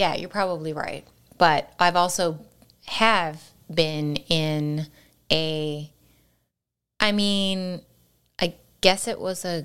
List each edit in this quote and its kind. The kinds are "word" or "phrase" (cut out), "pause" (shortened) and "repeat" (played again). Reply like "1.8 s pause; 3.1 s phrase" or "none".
none

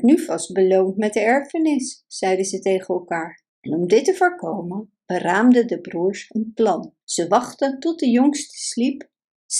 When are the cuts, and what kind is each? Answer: 3.5 s pause; 7.0 s pause

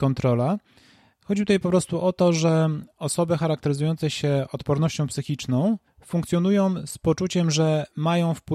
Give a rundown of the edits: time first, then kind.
none

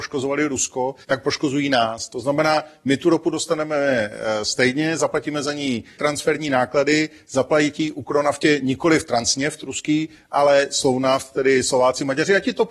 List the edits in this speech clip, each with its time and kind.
1.0 s pause; 6.0 s phrase

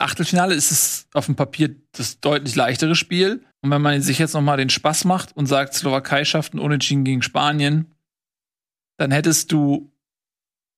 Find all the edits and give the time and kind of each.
3.5 s pause

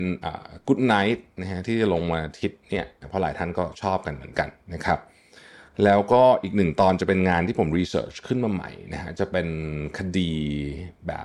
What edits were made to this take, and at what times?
none

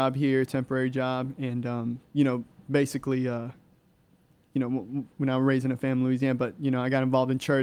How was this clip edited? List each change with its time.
none

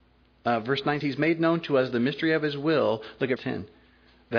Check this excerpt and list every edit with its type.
1.0 s word; 3.4 s word

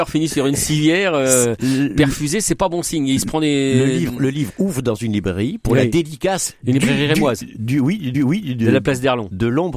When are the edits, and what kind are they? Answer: 8.1 s repeat

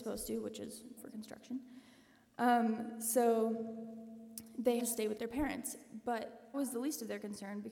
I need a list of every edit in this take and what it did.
1.0 s word; 4.8 s word; 5.2 s word; 6.5 s word

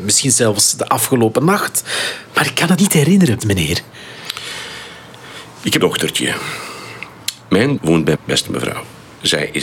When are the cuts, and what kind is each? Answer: 2.8 s word; 3.4 s word; 5.8 s word; 7.8 s word; 8.1 s word

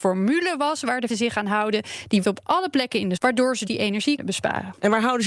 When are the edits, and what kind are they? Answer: 1.1 s word; 2.2 s word; 3.2 s word; 3.7 s word; 4.2 s word

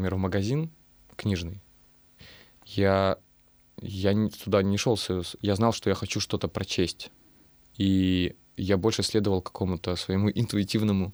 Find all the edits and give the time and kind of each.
none

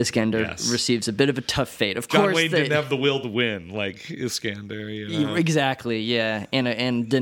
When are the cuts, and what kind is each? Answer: none

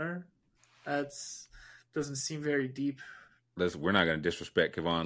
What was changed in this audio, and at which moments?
none

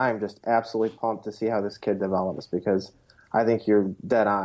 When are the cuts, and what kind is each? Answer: none

